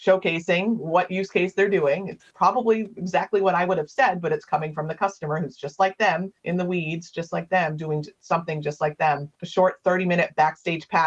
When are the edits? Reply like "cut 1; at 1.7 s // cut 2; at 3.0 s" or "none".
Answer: cut 1; at 2.3 s // cut 2; at 6.4 s // cut 3; at 9.3 s